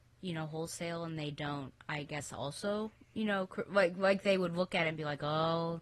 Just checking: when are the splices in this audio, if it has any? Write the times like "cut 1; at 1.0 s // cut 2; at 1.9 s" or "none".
cut 1; at 1.8 s